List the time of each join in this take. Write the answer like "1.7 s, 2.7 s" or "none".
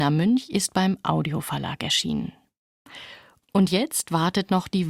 none